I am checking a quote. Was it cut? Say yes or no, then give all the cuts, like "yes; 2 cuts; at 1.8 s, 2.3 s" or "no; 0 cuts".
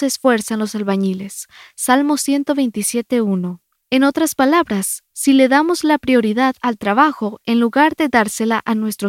no; 0 cuts